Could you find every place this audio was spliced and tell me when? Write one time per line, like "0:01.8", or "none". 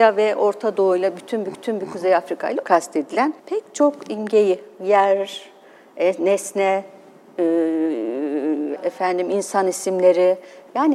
0:01.5
0:02.6
0:03.4
0:08.8